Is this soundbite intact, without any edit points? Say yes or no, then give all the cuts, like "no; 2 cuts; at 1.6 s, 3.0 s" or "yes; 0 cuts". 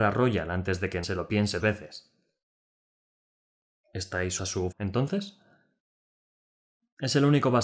no; 4 cuts; at 1.0 s, 1.6 s, 4.4 s, 4.7 s